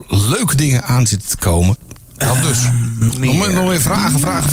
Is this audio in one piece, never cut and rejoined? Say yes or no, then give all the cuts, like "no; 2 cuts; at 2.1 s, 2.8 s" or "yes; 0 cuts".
no; 1 cut; at 3.1 s